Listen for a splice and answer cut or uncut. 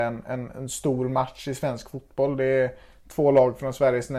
uncut